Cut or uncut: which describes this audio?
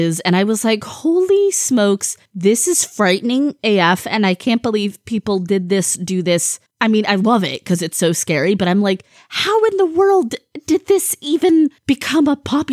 uncut